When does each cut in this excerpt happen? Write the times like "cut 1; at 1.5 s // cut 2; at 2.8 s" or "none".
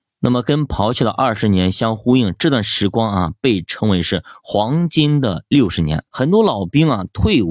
cut 1; at 6.1 s